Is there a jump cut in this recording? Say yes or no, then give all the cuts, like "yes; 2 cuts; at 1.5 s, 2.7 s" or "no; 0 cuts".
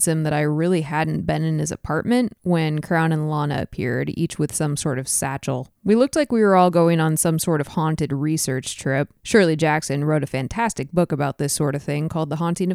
yes; 2 cuts; at 5.7 s, 9.2 s